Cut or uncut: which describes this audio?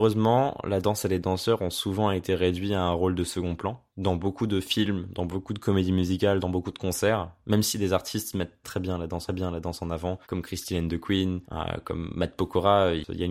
cut